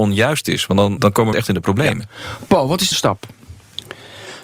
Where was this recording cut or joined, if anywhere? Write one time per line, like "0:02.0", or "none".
0:01.0
0:01.3
0:02.9